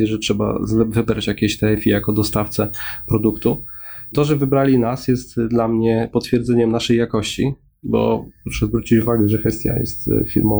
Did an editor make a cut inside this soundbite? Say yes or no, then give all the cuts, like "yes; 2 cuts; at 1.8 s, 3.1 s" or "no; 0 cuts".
no; 0 cuts